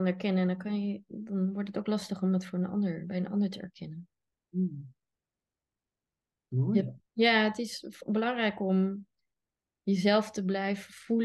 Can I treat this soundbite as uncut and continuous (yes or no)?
no